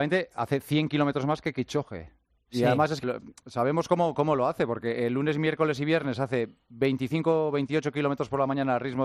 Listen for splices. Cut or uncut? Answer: cut